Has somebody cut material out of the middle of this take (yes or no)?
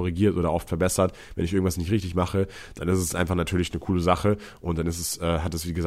no